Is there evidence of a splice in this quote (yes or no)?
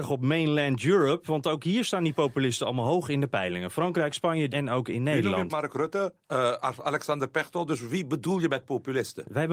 yes